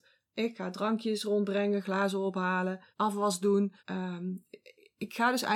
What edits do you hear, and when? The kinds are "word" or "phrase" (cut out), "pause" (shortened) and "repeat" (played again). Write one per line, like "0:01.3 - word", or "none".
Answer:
0:02.9 - pause
0:03.8 - pause